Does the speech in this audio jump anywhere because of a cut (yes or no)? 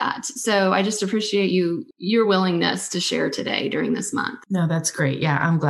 no